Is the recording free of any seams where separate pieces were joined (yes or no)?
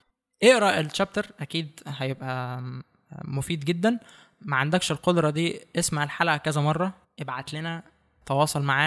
no